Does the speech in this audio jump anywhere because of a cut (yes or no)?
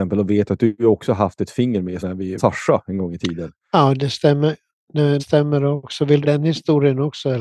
yes